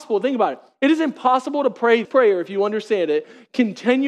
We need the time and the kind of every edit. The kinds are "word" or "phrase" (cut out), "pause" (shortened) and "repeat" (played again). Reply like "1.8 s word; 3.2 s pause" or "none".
2.0 s word